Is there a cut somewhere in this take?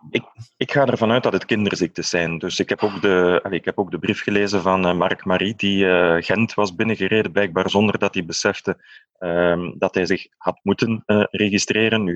no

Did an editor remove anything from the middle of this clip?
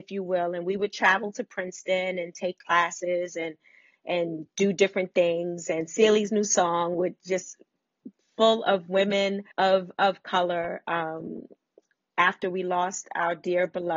yes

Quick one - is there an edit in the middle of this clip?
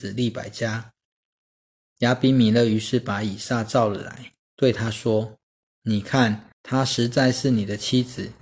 yes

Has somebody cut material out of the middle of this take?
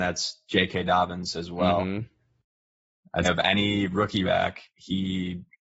yes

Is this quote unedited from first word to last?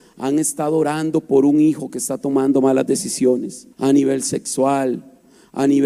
no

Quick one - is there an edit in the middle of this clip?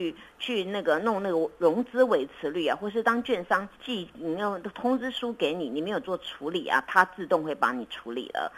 yes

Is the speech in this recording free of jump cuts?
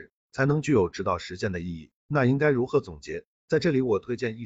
no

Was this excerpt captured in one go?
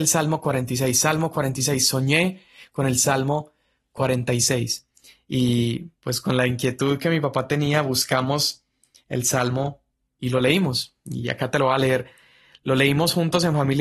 no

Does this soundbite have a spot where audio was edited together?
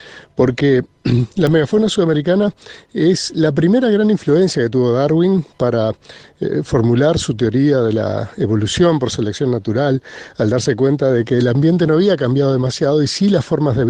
no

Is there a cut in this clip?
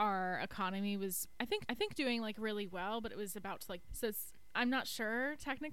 yes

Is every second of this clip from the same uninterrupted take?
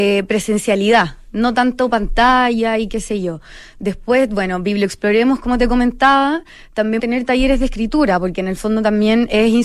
no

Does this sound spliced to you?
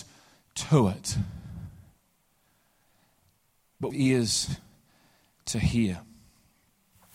yes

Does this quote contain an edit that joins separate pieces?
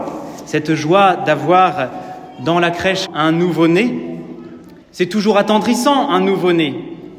yes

